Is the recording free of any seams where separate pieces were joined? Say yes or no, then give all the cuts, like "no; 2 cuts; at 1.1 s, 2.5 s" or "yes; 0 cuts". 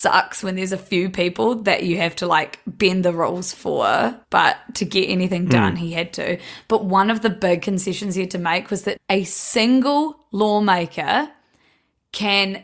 no; 2 cuts; at 4.2 s, 9.0 s